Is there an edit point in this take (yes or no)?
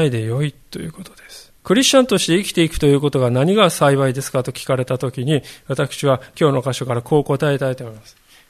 yes